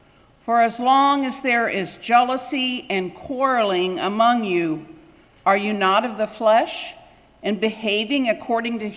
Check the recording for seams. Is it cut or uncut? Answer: uncut